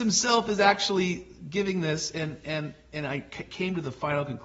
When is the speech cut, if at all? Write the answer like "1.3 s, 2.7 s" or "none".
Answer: none